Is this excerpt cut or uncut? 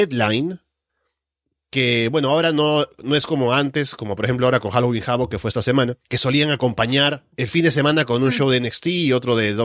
cut